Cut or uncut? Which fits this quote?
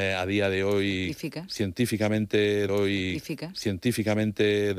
cut